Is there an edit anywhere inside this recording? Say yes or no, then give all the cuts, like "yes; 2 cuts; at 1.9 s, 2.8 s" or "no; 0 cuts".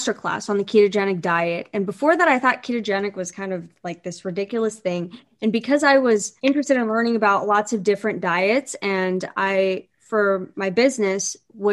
yes; 1 cut; at 6.4 s